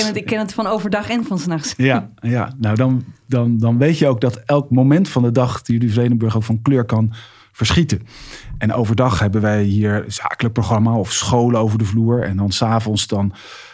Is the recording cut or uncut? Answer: uncut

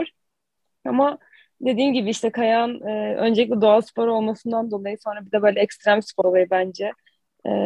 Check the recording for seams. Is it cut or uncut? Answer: cut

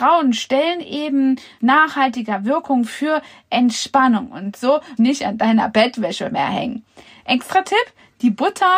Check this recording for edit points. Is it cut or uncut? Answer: cut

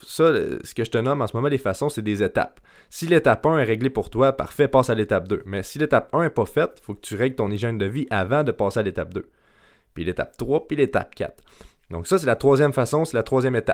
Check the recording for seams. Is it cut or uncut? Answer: uncut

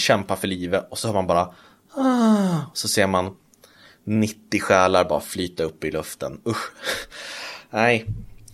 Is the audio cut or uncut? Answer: uncut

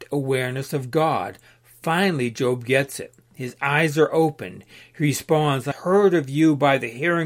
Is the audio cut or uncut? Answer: cut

